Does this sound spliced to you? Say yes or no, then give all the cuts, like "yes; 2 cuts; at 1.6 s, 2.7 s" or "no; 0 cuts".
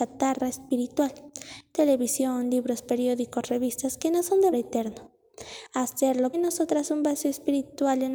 yes; 2 cuts; at 4.5 s, 6.3 s